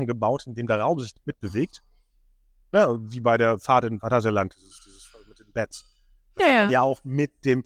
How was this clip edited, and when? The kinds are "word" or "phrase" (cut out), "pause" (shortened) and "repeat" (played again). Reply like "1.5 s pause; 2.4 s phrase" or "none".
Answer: none